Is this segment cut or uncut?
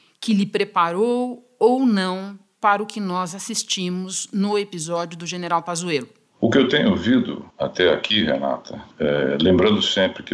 cut